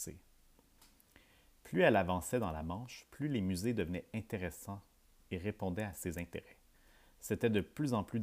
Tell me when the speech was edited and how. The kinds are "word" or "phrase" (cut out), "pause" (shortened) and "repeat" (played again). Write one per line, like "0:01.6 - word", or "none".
none